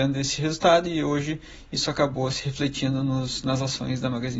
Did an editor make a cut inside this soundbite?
no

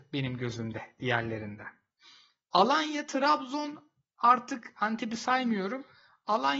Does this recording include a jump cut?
no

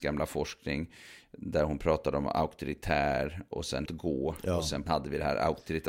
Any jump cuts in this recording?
yes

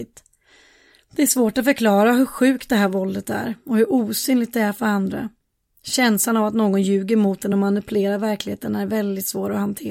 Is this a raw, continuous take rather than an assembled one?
yes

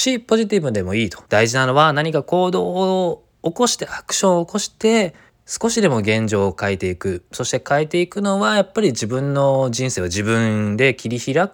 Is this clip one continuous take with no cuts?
no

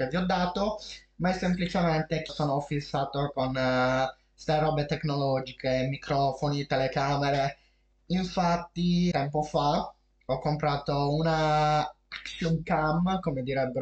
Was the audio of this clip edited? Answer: yes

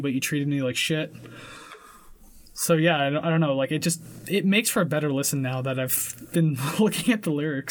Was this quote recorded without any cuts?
yes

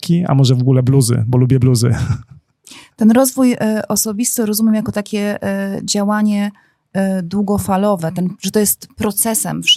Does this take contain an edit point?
no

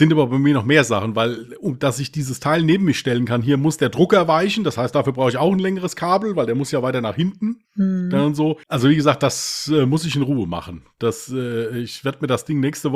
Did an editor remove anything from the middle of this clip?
yes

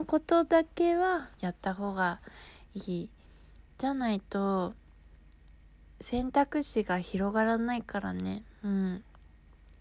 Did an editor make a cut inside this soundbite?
yes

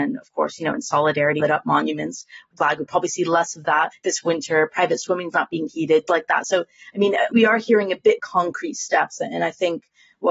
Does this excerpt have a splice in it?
yes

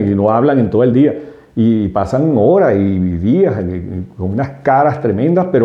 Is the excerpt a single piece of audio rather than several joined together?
yes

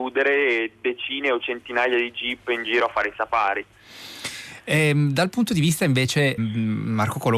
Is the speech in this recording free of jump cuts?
no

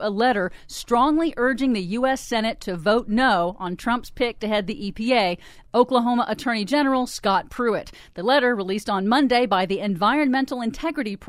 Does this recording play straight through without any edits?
yes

